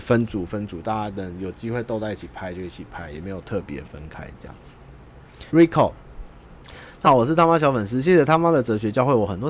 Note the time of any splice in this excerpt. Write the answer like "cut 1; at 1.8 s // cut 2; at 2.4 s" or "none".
cut 1; at 5.5 s // cut 2; at 7.0 s